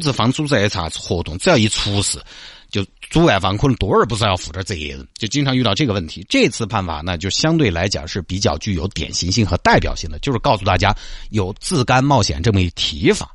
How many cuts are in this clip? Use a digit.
1